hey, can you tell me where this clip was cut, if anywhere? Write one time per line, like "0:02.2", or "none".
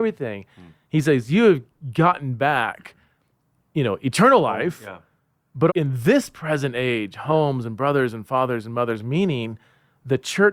0:05.7